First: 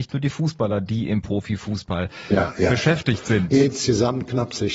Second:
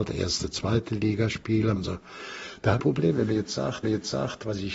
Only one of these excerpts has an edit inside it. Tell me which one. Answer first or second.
second